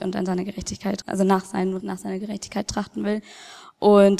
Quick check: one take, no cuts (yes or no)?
no